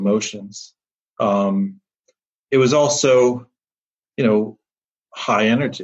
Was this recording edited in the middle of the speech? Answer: no; 0 cuts

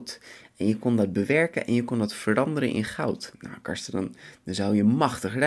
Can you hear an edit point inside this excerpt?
no; 0 cuts

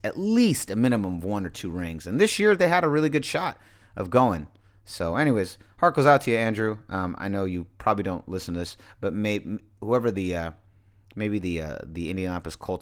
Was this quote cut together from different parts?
no; 0 cuts

